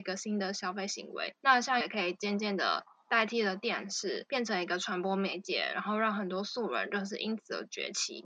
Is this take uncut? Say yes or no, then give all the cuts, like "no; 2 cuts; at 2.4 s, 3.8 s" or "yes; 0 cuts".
no; 1 cut; at 1.8 s